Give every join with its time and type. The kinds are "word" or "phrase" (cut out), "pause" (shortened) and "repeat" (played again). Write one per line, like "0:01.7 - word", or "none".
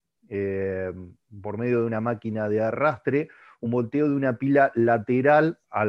none